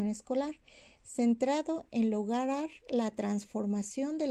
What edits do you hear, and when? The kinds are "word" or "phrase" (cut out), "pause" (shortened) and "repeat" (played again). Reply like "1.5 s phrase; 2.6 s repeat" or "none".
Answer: none